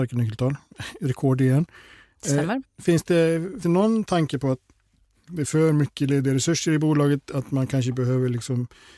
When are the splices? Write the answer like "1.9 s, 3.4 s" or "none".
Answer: 3.6 s, 5.5 s